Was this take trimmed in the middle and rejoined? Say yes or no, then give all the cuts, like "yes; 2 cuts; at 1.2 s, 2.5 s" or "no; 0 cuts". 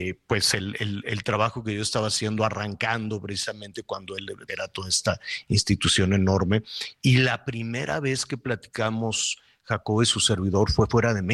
yes; 1 cut; at 4.5 s